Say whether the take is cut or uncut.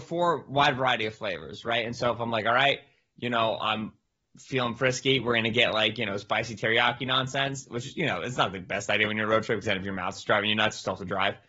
uncut